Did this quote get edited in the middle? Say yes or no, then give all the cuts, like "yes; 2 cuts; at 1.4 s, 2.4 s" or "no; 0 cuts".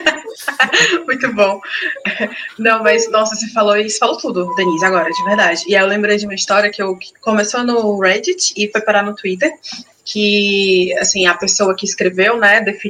no; 0 cuts